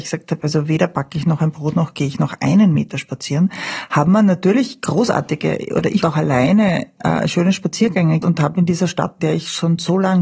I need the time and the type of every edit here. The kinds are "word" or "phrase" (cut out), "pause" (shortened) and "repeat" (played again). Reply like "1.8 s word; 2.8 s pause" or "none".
6.0 s word; 8.2 s word; 9.2 s word